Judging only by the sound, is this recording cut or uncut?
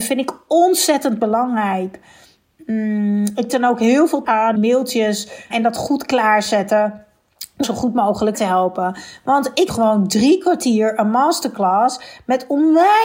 cut